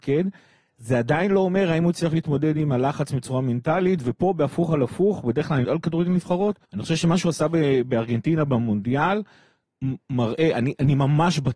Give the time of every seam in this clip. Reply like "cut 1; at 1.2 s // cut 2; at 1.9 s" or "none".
cut 1; at 5.6 s // cut 2; at 6.6 s